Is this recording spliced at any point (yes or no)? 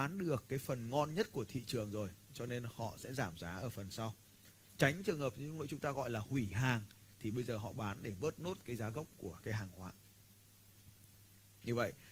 no